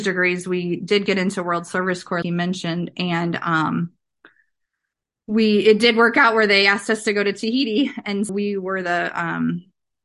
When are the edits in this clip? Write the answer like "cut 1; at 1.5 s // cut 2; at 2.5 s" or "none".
cut 1; at 2.2 s // cut 2; at 8.3 s